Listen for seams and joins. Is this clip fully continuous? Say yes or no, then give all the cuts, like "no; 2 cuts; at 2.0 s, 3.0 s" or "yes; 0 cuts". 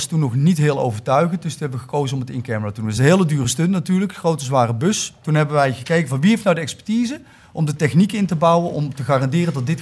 yes; 0 cuts